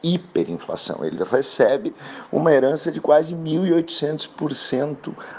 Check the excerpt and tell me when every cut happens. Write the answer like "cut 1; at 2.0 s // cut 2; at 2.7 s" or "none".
none